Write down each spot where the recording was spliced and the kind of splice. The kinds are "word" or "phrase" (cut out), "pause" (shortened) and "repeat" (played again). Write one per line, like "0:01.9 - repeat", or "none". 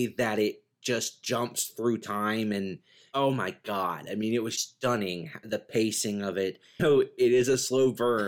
0:04.6 - word
0:06.8 - word